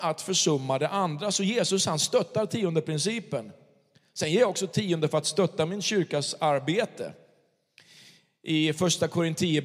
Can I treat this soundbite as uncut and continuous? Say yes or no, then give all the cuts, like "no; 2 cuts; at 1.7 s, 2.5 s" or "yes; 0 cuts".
yes; 0 cuts